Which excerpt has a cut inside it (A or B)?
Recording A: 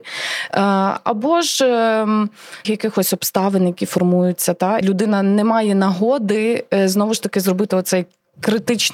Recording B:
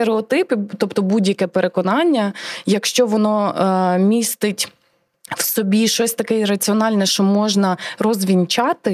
A